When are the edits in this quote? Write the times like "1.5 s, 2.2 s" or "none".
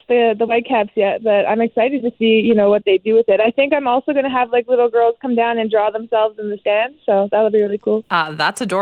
none